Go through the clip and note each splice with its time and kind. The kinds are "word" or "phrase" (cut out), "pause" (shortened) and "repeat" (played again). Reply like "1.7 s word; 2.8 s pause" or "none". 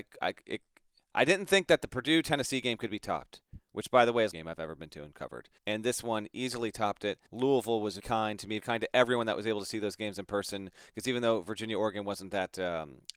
4.3 s phrase; 5.6 s pause; 7.3 s pause; 8.0 s word; 8.6 s word